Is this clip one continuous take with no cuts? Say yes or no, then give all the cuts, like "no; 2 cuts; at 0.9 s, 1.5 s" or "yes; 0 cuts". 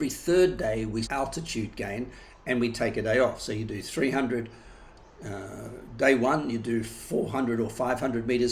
no; 1 cut; at 1.0 s